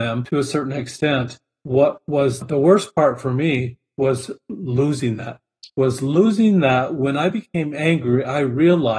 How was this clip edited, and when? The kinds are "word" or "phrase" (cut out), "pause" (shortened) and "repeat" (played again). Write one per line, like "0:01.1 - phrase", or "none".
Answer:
none